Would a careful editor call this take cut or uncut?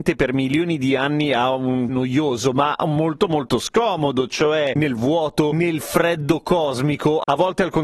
cut